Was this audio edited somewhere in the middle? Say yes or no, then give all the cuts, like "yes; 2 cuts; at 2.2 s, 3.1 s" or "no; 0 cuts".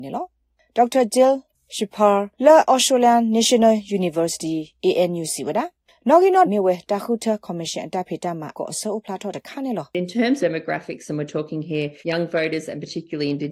yes; 5 cuts; at 2.3 s, 6.4 s, 8.5 s, 10.4 s, 12.0 s